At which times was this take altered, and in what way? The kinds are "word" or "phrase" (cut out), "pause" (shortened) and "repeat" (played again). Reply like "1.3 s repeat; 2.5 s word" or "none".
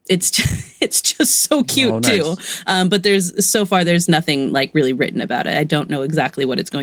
none